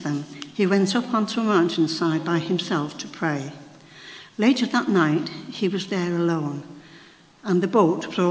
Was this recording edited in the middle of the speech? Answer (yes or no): no